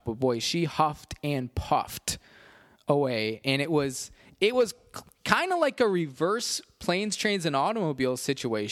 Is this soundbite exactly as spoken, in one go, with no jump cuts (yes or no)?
yes